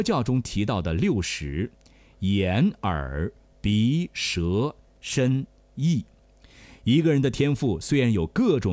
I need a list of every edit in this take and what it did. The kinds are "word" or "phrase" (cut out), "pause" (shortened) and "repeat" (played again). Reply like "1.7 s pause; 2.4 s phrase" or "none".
none